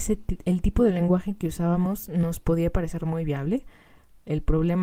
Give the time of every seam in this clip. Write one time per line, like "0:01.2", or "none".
none